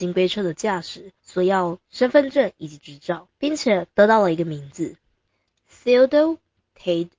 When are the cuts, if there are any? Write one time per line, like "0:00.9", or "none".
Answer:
0:01.2
0:01.8
0:03.3
0:03.9